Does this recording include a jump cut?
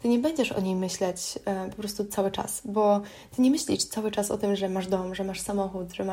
no; 0 cuts

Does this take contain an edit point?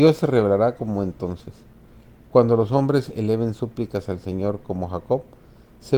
no; 0 cuts

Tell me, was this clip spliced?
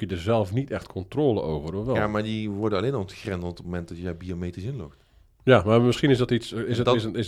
no; 0 cuts

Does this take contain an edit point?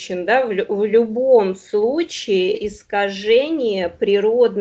yes; 1 cut; at 2.5 s

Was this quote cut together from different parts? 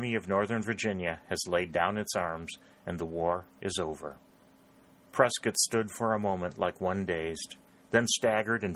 no; 0 cuts

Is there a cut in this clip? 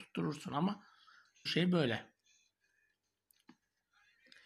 yes; 1 cut; at 1.5 s

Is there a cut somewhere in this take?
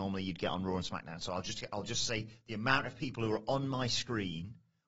no; 0 cuts

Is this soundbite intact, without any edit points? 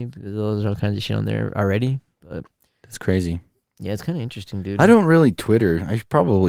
yes; 0 cuts

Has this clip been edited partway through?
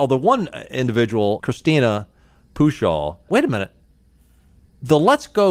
yes; 2 cuts; at 1.4 s, 3.3 s

